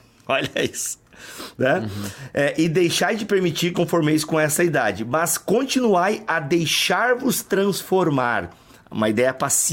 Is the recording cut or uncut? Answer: cut